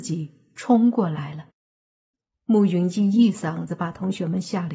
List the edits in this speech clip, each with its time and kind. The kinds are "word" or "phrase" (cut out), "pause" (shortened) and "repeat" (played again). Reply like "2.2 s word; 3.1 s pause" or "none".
none